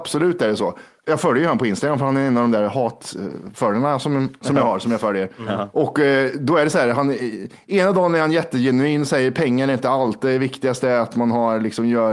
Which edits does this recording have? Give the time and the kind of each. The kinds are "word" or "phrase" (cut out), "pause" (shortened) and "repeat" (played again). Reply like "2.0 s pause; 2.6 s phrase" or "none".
none